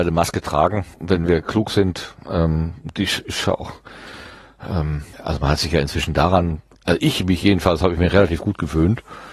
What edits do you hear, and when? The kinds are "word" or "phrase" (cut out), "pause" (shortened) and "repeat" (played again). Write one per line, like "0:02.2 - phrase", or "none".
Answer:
0:00.9 - pause
0:05.1 - pause